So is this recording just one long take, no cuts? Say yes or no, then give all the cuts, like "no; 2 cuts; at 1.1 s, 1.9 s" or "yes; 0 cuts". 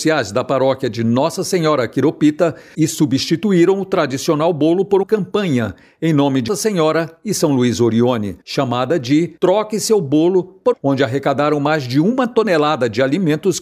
no; 6 cuts; at 2.7 s, 5.0 s, 6.5 s, 8.4 s, 9.4 s, 10.7 s